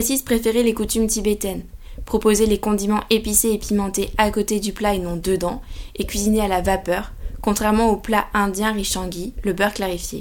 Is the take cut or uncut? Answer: uncut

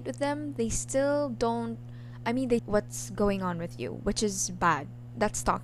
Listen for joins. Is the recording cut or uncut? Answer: cut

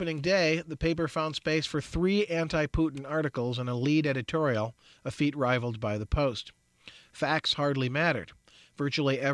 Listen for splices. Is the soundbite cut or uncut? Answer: uncut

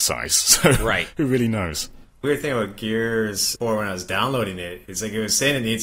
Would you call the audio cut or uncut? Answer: cut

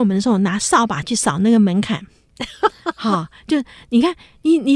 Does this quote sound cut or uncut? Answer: uncut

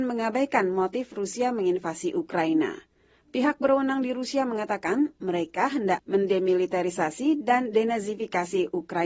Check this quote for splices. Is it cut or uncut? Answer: uncut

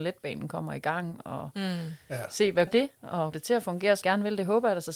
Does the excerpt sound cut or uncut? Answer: cut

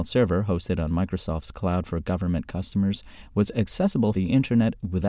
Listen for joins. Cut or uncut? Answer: cut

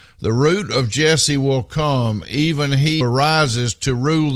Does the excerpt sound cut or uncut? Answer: cut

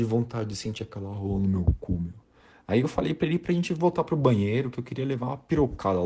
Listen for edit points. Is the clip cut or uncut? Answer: uncut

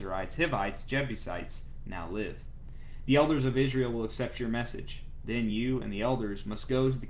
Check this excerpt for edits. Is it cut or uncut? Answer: uncut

